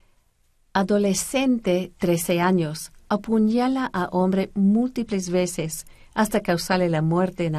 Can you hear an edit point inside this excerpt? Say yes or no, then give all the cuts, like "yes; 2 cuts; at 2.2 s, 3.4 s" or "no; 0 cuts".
no; 0 cuts